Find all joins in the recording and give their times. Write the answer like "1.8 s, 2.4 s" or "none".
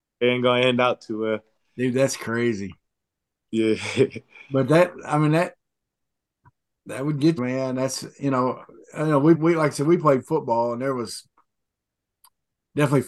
7.4 s, 9.3 s